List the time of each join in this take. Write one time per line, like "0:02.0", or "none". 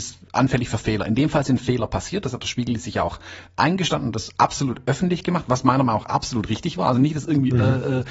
none